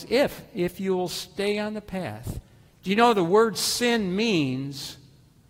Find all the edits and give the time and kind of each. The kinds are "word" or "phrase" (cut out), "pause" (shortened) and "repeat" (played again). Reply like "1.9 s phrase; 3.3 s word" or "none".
none